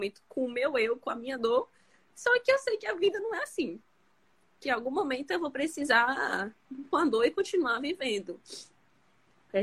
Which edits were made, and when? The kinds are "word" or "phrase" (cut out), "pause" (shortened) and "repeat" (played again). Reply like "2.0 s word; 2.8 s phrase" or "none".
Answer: 6.9 s word